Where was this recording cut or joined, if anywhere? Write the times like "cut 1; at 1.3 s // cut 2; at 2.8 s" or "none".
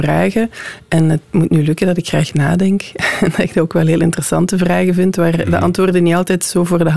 cut 1; at 1.2 s